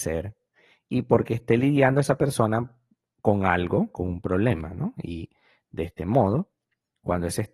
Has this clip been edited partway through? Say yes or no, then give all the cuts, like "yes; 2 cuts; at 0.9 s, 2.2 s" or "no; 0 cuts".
no; 0 cuts